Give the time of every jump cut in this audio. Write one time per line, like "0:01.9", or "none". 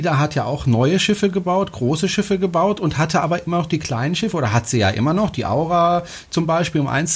none